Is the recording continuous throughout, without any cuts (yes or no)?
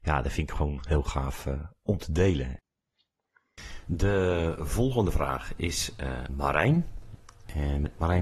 no